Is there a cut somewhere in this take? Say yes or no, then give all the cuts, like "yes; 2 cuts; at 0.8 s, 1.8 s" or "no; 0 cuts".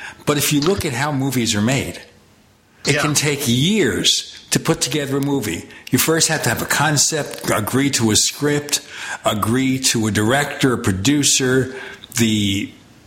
no; 0 cuts